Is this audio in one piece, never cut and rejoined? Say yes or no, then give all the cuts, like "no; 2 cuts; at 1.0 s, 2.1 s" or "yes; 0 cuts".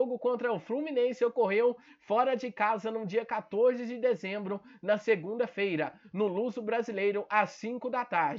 yes; 0 cuts